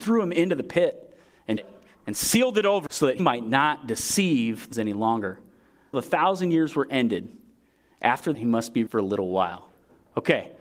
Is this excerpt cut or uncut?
cut